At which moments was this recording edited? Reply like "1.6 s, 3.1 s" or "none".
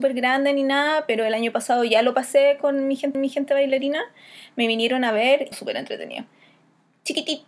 3.1 s, 5.5 s